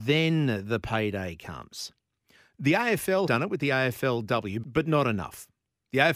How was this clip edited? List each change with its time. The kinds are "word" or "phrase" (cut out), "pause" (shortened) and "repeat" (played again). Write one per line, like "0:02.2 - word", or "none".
0:03.3 - word
0:04.6 - word